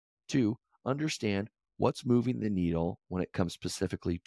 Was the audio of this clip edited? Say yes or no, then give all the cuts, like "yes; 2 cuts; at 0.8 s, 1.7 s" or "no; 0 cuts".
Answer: no; 0 cuts